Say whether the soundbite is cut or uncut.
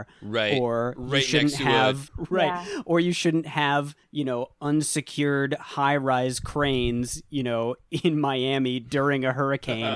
cut